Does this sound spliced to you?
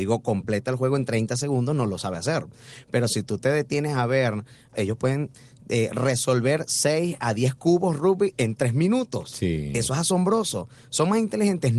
yes; 1 cut; at 4.7 s

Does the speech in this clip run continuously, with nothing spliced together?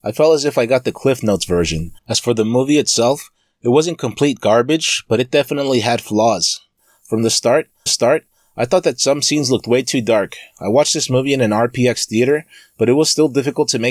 no; 2 cuts; at 2.0 s, 7.9 s

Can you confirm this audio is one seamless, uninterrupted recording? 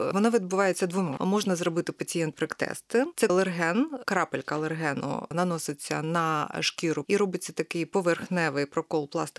no; 4 cuts; at 1.2 s, 2.3 s, 3.3 s, 7.0 s

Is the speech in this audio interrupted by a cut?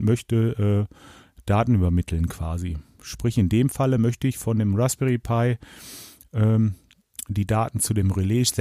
no; 0 cuts

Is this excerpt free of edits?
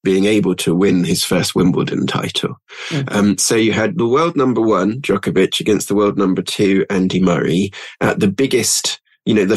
yes; 0 cuts

